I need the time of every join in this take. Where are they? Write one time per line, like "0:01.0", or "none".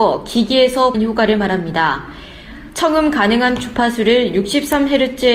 0:00.9